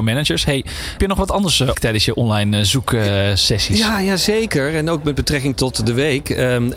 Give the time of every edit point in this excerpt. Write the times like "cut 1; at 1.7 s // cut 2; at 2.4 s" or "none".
cut 1; at 1.0 s // cut 2; at 1.7 s // cut 3; at 5.5 s